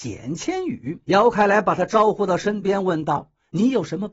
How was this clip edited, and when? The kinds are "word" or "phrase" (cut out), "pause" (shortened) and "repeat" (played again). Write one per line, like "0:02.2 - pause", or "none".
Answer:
0:01.0 - pause